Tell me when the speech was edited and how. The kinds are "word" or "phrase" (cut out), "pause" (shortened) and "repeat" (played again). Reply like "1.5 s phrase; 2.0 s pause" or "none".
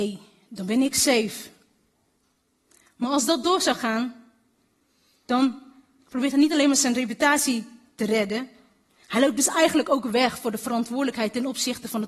none